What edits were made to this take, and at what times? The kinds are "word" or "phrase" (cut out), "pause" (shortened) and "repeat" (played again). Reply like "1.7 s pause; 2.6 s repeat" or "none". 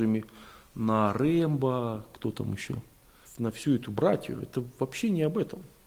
3.2 s word